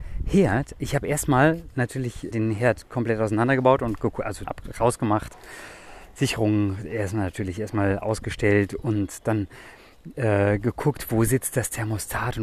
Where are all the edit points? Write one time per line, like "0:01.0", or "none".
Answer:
0:02.3
0:04.5